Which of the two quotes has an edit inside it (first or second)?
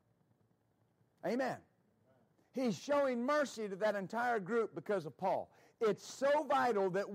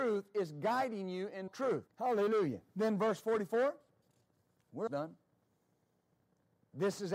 second